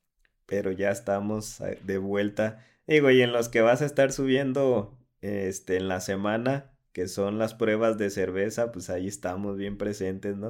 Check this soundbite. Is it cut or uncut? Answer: uncut